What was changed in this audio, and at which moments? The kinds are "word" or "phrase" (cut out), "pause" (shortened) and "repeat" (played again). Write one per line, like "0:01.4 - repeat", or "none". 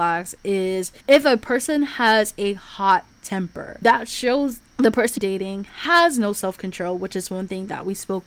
0:01.0 - pause
0:04.6 - word
0:05.2 - word